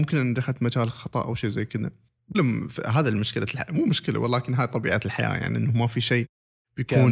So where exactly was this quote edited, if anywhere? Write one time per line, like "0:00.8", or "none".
0:02.3